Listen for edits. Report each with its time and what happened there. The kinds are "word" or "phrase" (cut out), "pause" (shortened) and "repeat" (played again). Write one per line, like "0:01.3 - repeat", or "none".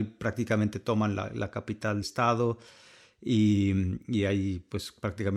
0:02.0 - word